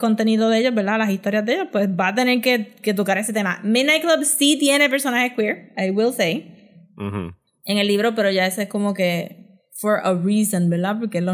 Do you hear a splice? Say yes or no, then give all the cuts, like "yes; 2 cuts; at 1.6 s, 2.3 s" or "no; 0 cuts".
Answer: no; 0 cuts